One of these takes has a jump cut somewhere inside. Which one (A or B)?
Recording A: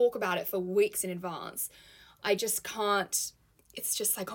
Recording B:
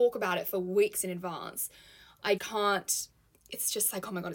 B